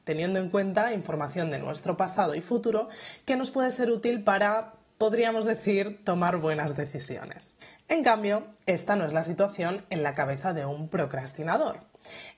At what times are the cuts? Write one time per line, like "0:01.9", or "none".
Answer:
none